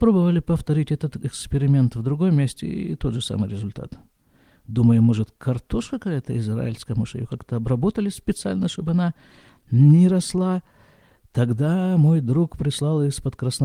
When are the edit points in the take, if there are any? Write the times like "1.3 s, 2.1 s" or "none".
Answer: none

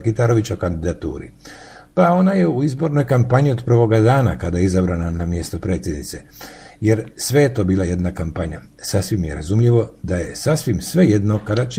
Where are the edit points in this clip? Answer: none

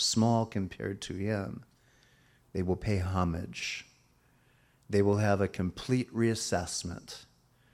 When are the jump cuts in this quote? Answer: none

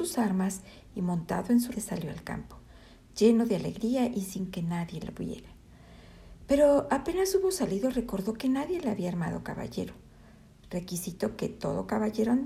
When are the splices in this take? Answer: 1.7 s

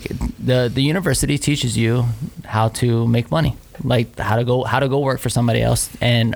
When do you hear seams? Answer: none

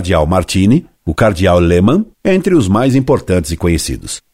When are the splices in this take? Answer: 0.9 s, 2.1 s

